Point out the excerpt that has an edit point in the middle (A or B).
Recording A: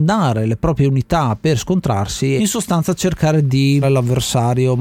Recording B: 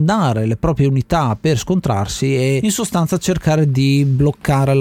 A